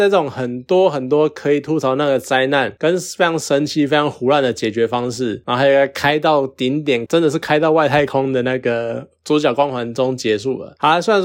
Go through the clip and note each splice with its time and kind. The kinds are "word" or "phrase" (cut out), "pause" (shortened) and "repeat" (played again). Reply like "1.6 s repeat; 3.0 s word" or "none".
7.1 s phrase

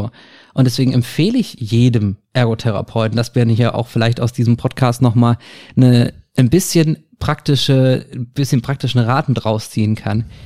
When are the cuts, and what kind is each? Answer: none

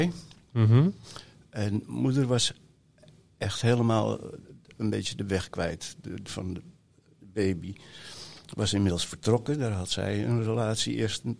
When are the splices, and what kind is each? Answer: 6.3 s word

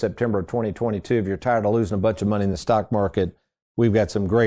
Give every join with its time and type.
none

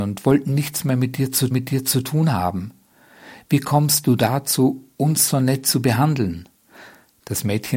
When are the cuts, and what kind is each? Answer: 1.5 s repeat

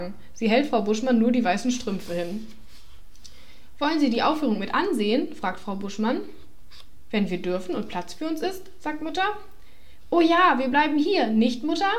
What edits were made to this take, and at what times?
none

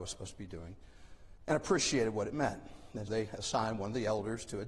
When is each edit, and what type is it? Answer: 3.1 s word

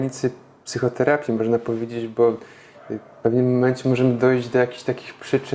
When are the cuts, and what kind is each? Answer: none

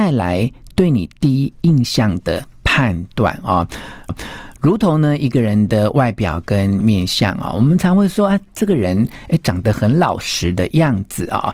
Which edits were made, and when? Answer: 4.1 s repeat

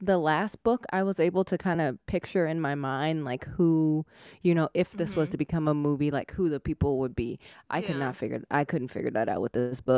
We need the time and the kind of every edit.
none

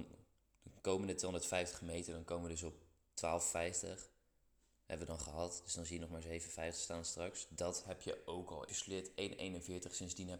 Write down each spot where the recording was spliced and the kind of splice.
8.7 s phrase

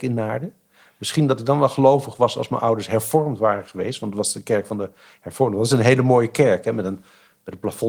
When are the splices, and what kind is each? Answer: none

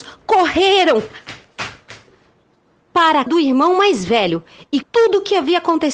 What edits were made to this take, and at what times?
3.3 s word; 4.8 s word

